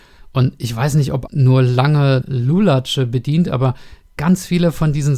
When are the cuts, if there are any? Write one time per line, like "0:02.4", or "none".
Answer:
0:01.3
0:02.2